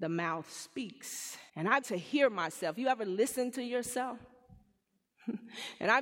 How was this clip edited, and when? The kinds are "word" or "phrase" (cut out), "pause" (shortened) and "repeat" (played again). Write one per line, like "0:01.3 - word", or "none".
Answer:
0:01.5 - pause
0:01.8 - word